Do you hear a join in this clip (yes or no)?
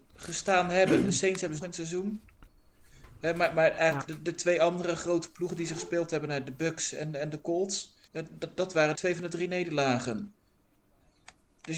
yes